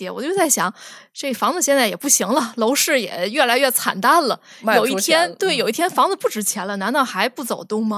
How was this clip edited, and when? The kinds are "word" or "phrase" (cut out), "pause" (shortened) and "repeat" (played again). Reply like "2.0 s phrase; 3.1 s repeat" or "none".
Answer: none